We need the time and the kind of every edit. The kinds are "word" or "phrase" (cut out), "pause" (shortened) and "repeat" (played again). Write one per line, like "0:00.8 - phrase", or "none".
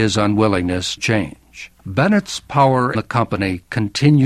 0:01.0 - word
0:01.8 - pause
0:02.9 - word